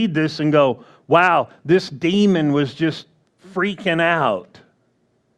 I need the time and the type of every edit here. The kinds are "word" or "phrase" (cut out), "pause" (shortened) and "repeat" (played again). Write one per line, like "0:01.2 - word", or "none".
none